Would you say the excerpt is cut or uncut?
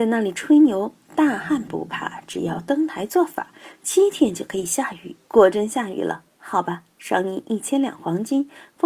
cut